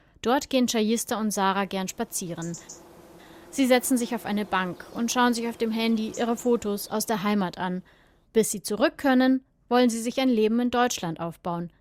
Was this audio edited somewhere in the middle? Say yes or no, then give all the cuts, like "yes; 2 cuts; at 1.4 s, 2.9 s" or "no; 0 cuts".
no; 0 cuts